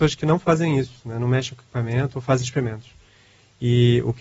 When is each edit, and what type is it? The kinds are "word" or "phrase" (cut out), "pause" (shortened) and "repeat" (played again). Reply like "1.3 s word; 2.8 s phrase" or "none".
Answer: none

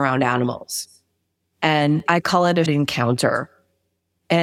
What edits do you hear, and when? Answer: 2.1 s word; 2.7 s word

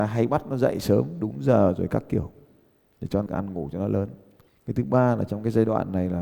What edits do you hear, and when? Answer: 3.3 s word

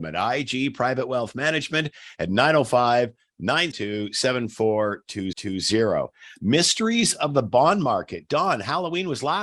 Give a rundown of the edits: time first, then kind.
3.7 s word; 5.3 s repeat

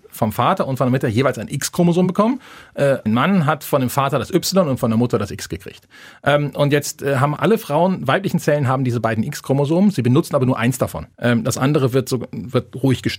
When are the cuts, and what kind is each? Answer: 3.1 s word; 7.4 s word; 11.1 s pause

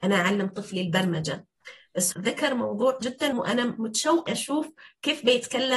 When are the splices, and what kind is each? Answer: 2.1 s word; 3.0 s word; 3.3 s word; 4.3 s word

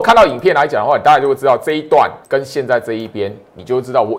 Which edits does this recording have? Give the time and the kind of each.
2.2 s pause

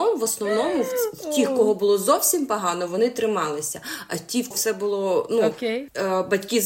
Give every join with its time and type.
4.5 s word

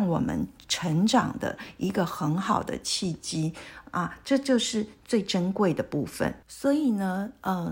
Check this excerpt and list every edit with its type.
6.4 s pause

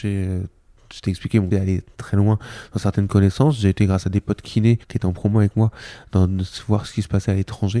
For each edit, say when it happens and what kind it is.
1.5 s word; 4.8 s pause

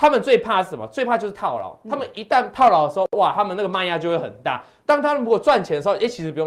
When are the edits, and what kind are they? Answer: none

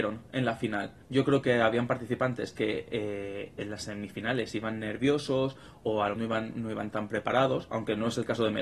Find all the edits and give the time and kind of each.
1.0 s pause; 6.2 s word

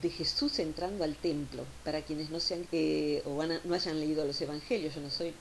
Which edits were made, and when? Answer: 2.7 s word

